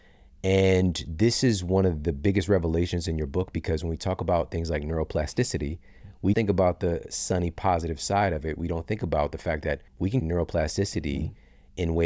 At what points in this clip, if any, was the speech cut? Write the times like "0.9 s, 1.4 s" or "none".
6.3 s, 9.9 s, 10.2 s